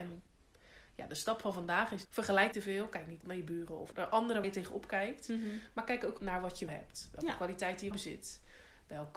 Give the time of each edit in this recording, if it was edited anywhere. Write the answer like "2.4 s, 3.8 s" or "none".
2.0 s, 2.5 s, 3.2 s, 3.9 s, 4.4 s, 6.2 s, 6.7 s, 7.9 s